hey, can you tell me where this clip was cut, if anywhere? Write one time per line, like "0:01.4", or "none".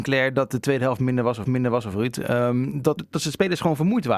0:01.4
0:03.0